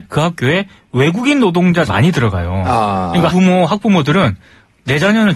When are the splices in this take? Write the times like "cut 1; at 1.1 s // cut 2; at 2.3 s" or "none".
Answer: cut 1; at 1.9 s // cut 2; at 3.3 s